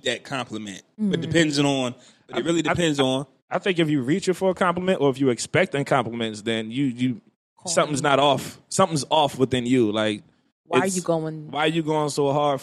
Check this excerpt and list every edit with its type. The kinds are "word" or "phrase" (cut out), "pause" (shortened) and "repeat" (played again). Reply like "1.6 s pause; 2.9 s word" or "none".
none